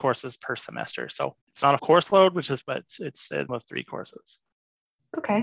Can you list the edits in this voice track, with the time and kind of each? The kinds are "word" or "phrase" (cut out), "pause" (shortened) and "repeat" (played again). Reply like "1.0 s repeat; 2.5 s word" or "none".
1.4 s pause; 1.8 s word; 2.6 s word; 3.0 s word; 3.5 s word